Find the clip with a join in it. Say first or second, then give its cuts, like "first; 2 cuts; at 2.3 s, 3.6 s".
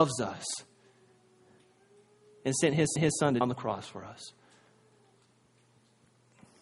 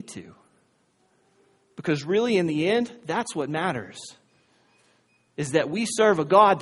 first; 2 cuts; at 3.0 s, 3.4 s